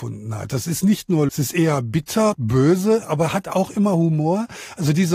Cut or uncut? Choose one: cut